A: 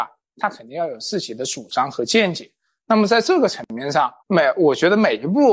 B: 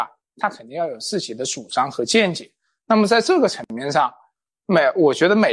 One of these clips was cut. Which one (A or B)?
A